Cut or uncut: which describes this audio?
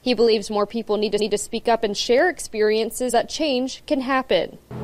cut